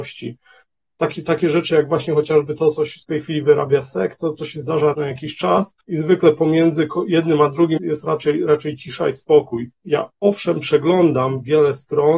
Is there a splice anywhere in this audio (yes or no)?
yes